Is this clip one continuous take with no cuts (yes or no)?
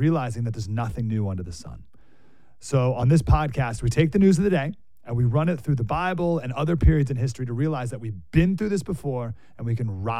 yes